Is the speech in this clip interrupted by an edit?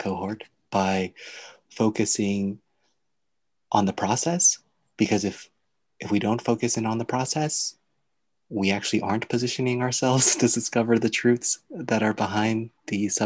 no; 0 cuts

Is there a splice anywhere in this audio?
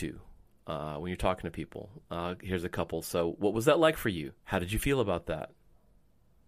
yes; 1 cut; at 4.4 s

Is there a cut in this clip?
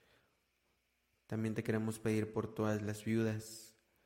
no; 0 cuts

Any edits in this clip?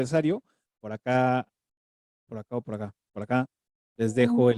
no; 0 cuts

